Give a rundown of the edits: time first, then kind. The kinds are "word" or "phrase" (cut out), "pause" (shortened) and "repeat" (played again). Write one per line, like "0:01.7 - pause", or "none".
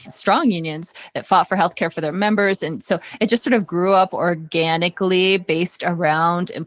none